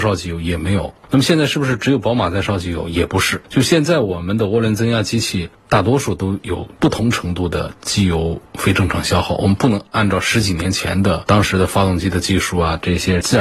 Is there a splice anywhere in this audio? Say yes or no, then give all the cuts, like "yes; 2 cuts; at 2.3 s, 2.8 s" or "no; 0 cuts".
yes; 1 cut; at 6.7 s